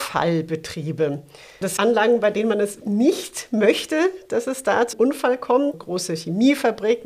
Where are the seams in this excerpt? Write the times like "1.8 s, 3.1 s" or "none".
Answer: 1.8 s, 2.8 s, 4.9 s, 5.7 s